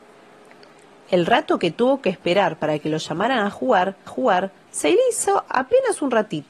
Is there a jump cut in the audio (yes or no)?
yes